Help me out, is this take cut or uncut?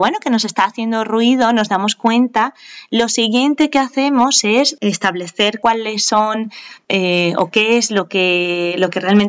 uncut